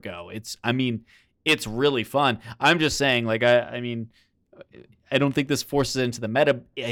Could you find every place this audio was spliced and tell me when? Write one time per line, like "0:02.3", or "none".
none